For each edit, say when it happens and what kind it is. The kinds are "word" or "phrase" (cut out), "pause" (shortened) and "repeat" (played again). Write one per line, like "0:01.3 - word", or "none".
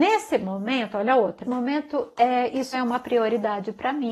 0:01.4 - word
0:02.7 - word

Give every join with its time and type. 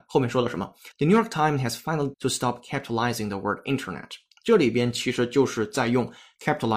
0:00.9 - pause
0:02.1 - word

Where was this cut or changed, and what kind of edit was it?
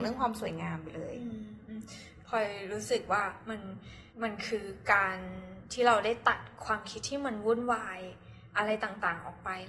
0:04.1 - pause

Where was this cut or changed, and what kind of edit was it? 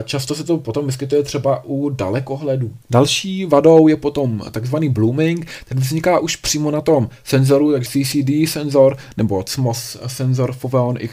0:02.8 - pause
0:07.9 - phrase

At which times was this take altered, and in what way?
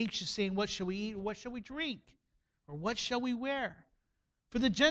none

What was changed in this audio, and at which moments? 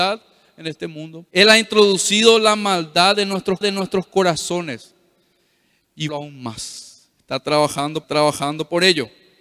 0:01.3 - pause
0:03.6 - repeat
0:06.1 - phrase
0:08.0 - repeat

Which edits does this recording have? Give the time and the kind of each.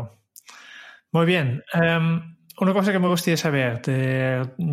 none

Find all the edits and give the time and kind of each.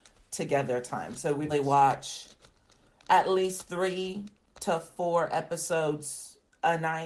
0:01.5 - word

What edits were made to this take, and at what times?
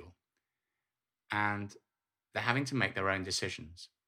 none

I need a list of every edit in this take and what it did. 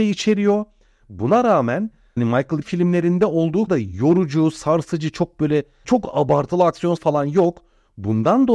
0:02.2 - word
0:02.6 - word
0:03.7 - word
0:05.8 - word
0:07.0 - word

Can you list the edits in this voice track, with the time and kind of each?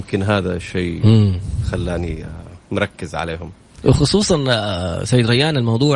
0:02.6 - pause

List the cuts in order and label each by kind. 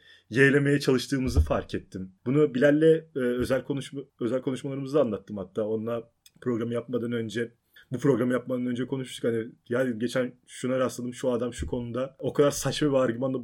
0:02.2 - pause
0:04.1 - pause
0:06.3 - pause
0:07.8 - pause

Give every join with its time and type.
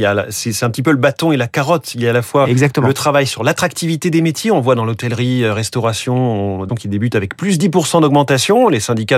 0:06.7 - word

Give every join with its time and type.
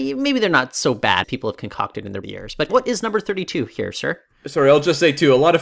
0:01.2 - word
0:02.2 - phrase
0:02.7 - word

